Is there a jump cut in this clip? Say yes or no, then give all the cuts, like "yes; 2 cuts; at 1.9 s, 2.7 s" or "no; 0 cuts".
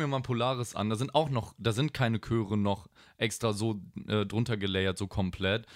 no; 0 cuts